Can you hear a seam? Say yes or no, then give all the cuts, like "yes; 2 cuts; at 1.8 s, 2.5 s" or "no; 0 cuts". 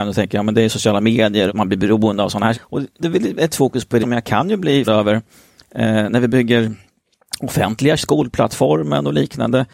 yes; 7 cuts; at 1.5 s, 2.5 s, 3.0 s, 3.5 s, 4.0 s, 4.8 s, 8.0 s